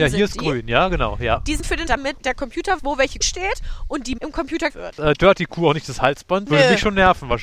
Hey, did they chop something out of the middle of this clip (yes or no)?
yes